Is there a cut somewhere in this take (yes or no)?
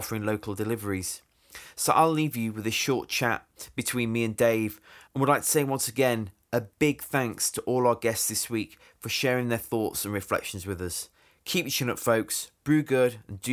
no